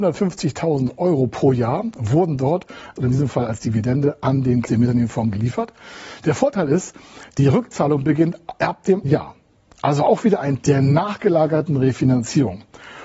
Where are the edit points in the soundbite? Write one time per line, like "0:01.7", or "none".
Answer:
0:03.0
0:04.6
0:09.0
0:10.6